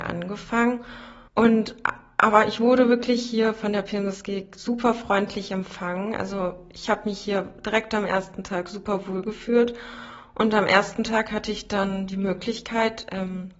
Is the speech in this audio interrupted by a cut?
yes; 1 cut; at 1.3 s

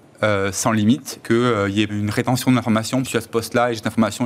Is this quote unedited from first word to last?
no; 3 cuts; at 1.2 s, 1.9 s, 3.0 s

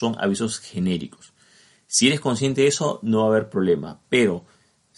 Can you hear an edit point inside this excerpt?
no; 0 cuts

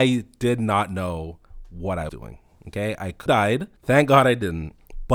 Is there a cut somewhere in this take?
yes; 3 cuts; at 2.1 s, 3.3 s, 3.8 s

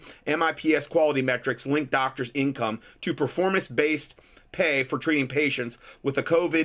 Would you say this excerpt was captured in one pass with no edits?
yes; 0 cuts

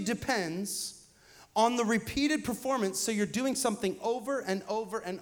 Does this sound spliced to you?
no; 0 cuts

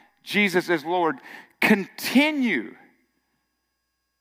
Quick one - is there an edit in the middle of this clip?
no; 0 cuts

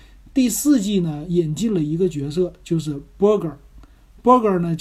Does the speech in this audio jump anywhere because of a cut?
no; 0 cuts

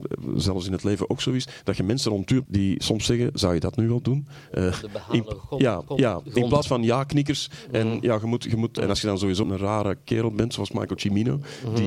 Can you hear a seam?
yes; 5 cuts; at 2.5 s, 5.9 s, 6.6 s, 8.8 s, 9.4 s

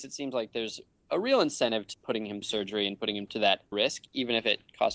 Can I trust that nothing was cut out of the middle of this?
no; 3 cuts; at 1.9 s, 2.4 s, 3.7 s

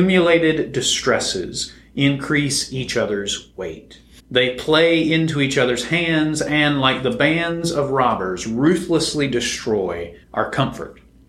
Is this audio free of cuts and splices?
no; 2 cuts; at 4.2 s, 10.2 s

